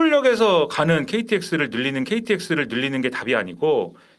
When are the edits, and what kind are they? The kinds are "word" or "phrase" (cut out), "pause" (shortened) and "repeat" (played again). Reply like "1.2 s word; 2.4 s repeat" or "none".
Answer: 2.0 s repeat

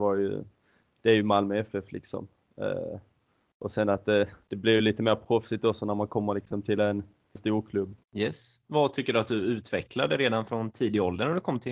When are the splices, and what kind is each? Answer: 4.4 s pause; 7.4 s word; 8.0 s pause

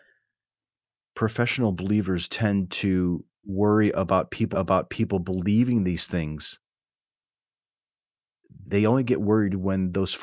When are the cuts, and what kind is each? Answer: 2.3 s word; 3.3 s pause; 4.5 s repeat; 8.7 s word

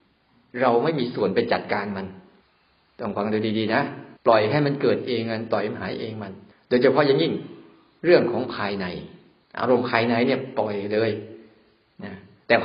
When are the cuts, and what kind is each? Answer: 2.4 s pause; 4.2 s pause; 6.5 s pause; 9.4 s pause

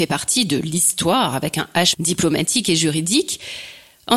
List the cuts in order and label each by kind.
1.9 s word

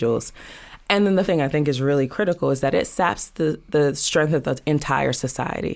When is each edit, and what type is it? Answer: 1.2 s word

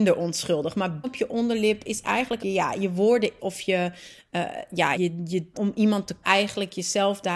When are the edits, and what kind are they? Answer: 1.0 s word; 2.4 s word; 3.4 s word; 4.9 s word; 5.5 s word; 6.2 s word

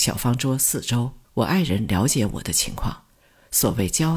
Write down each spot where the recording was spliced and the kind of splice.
1.2 s pause

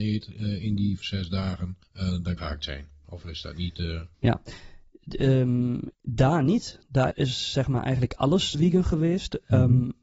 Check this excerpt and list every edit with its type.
1.0 s word; 1.8 s pause; 2.4 s phrase; 4.1 s pause; 5.9 s pause; 7.1 s word; 8.5 s word

